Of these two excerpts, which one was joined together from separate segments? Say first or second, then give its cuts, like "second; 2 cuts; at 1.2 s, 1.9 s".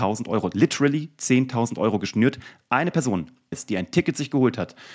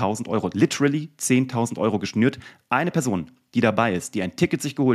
first; 1 cut; at 3.5 s